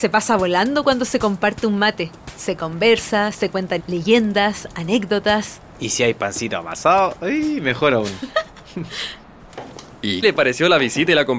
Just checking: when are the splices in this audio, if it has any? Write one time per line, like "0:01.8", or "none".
0:03.8
0:10.2